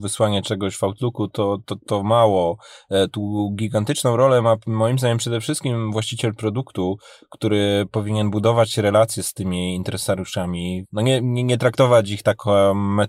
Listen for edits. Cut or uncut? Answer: uncut